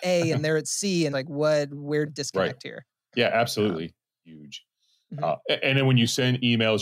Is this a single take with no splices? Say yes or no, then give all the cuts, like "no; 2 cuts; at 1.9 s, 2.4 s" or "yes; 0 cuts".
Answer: no; 2 cuts; at 1.1 s, 2.1 s